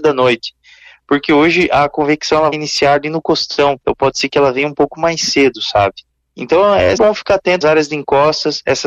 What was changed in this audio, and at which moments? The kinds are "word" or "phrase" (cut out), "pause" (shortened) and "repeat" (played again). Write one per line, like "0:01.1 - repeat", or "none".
0:02.5 - word
0:03.8 - pause
0:06.1 - pause
0:07.0 - word
0:07.6 - word

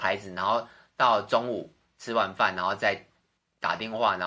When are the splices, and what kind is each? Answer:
none

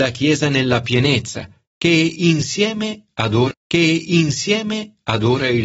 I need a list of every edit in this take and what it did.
0:03.5 - repeat

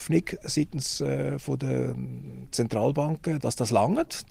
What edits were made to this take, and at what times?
0:03.4 - word

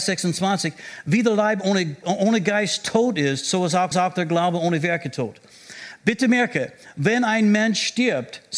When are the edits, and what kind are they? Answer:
0:02.0 - word
0:03.9 - repeat

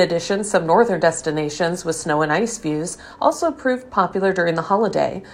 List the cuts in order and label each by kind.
none

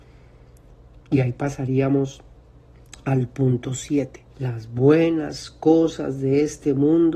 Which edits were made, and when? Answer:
0:01.0 - pause
0:04.3 - pause

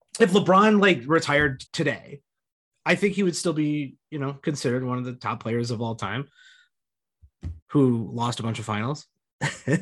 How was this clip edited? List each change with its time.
0:01.7 - pause
0:07.6 - pause

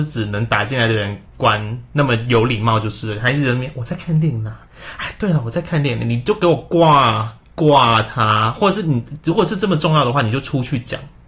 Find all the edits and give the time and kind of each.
0:01.3 - pause
0:07.4 - pause

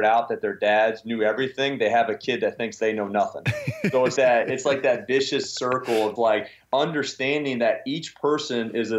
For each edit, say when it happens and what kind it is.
0:04.2 - word
0:06.2 - word

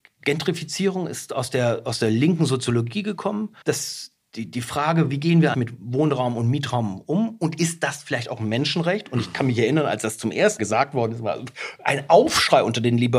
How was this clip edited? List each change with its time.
0:03.6 - pause
0:05.5 - word
0:10.6 - word

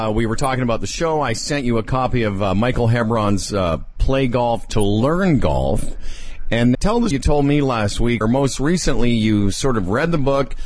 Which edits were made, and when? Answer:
0:06.7 - word
0:07.1 - word
0:08.2 - word

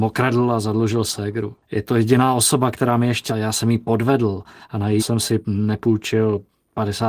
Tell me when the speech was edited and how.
0:01.6 - pause
0:03.3 - phrase
0:05.0 - word

